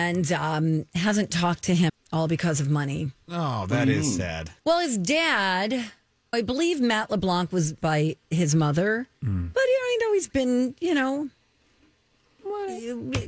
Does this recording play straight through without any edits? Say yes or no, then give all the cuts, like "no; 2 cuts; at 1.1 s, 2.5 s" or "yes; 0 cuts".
no; 6 cuts; at 1.9 s, 3.2 s, 4.6 s, 6.3 s, 7.8 s, 9.1 s